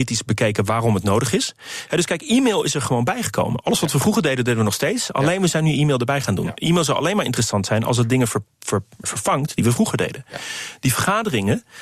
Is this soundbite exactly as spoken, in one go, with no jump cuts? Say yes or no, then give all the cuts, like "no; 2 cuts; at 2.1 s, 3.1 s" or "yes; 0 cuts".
no; 1 cut; at 9.0 s